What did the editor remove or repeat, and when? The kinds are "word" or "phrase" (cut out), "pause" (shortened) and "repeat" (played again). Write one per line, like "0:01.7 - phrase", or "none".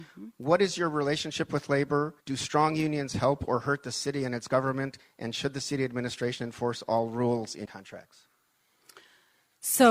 0:02.2 - pause
0:07.7 - word